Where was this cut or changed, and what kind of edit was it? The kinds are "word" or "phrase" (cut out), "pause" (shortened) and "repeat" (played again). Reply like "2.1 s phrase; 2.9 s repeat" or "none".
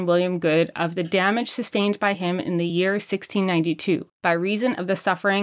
none